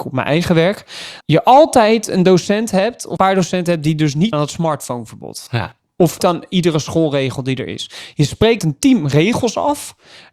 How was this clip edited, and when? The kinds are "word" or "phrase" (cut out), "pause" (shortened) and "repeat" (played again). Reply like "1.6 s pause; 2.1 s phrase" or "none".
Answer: 1.2 s word; 3.2 s word; 4.3 s word; 6.2 s word; 8.6 s word